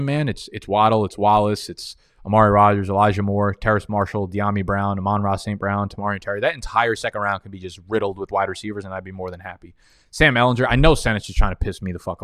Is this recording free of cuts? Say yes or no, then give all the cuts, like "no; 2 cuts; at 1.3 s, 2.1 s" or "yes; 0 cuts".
yes; 0 cuts